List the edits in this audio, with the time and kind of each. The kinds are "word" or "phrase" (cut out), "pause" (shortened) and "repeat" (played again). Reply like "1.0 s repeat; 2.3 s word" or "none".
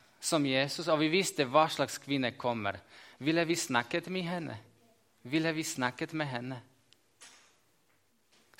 none

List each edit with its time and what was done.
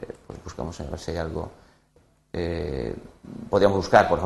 none

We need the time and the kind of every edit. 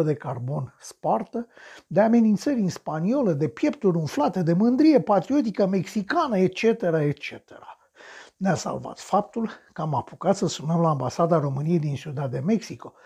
none

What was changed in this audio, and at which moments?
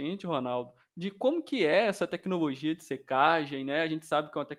none

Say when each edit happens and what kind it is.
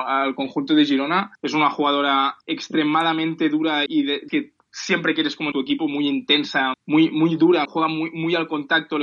1.4 s pause; 2.4 s pause; 3.9 s word; 4.3 s word; 5.5 s phrase; 6.7 s word; 7.6 s word

